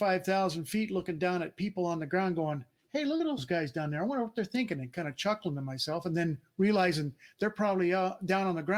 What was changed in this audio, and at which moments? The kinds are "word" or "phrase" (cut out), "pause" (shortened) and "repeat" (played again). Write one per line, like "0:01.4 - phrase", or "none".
none